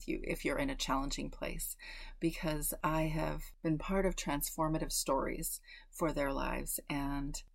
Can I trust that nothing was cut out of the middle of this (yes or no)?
yes